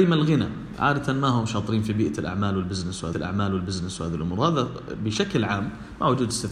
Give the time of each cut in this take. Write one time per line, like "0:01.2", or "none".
0:03.1